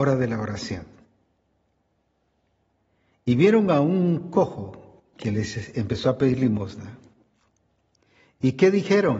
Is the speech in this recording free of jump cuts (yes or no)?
yes